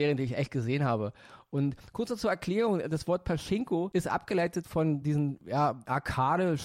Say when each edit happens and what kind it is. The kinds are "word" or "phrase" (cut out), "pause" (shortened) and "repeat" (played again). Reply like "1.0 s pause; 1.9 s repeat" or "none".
none